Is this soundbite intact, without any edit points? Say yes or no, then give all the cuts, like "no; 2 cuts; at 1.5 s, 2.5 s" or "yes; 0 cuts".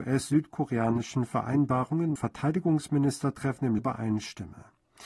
no; 2 cuts; at 2.2 s, 3.8 s